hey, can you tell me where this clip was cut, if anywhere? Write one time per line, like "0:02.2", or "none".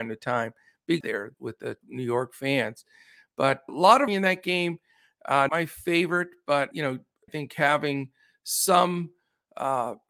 0:01.0
0:01.3
0:01.8
0:03.7
0:04.1
0:05.5
0:06.7
0:07.3